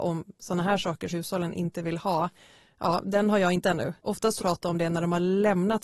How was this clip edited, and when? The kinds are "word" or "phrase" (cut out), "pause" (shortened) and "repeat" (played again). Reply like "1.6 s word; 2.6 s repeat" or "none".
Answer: 1.1 s word; 3.6 s word; 4.0 s pause; 4.4 s phrase